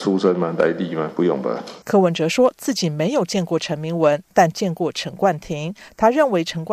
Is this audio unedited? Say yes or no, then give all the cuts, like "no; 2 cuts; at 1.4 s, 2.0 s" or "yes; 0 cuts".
no; 1 cut; at 1.8 s